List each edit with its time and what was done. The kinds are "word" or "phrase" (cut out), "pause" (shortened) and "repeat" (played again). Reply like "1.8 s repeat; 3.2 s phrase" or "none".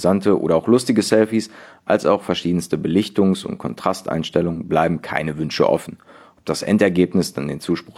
none